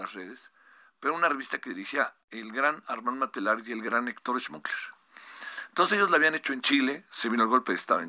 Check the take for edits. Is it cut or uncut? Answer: cut